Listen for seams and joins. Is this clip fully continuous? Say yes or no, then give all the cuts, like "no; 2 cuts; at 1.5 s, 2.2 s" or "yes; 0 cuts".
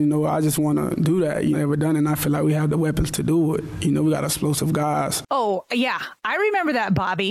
no; 1 cut; at 1.5 s